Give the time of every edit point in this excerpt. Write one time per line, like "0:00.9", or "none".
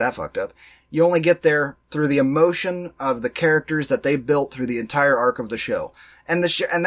0:01.8